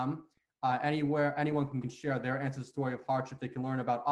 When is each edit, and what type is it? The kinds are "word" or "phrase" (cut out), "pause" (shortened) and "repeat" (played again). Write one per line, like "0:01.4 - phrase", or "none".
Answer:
0:01.8 - phrase